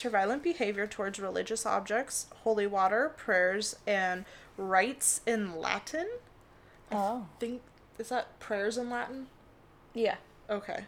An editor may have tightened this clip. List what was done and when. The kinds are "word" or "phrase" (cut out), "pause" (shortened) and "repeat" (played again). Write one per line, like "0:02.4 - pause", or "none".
none

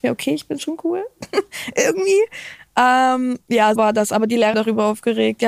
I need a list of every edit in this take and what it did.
0:03.8 - word
0:04.5 - phrase

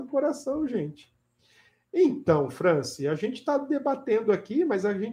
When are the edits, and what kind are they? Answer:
none

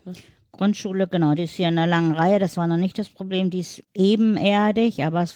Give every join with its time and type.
0:03.8 - pause

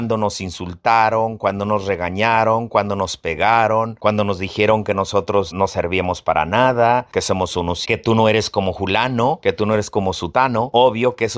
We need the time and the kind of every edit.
0:05.5 - word
0:07.8 - word

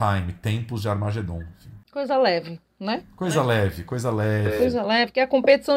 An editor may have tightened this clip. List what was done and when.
none

